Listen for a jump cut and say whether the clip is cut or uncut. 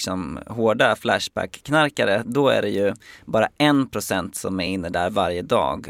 uncut